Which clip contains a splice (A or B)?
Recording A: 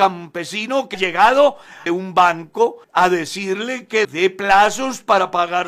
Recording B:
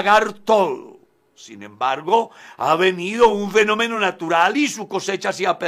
A